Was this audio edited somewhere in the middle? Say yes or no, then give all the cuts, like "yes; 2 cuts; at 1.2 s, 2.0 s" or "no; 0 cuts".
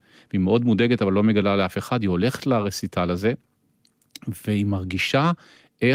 no; 0 cuts